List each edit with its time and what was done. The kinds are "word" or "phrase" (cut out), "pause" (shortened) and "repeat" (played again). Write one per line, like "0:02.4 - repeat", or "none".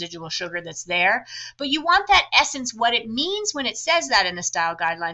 none